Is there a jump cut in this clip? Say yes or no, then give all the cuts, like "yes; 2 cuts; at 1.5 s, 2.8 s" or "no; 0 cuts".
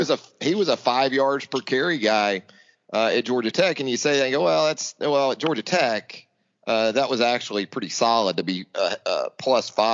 no; 0 cuts